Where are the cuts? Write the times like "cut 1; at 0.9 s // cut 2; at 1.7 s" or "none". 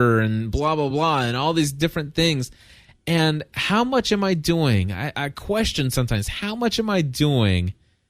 none